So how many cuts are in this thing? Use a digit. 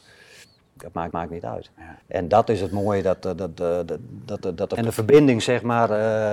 3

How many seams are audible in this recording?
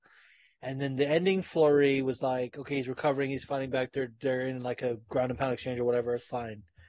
0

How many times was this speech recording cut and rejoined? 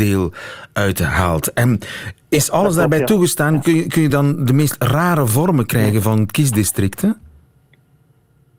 0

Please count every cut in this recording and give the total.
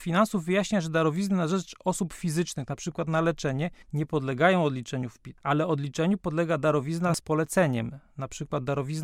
1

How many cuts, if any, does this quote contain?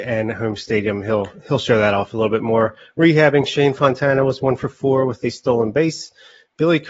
0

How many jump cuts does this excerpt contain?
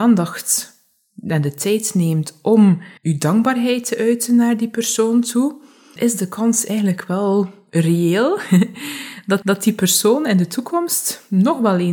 3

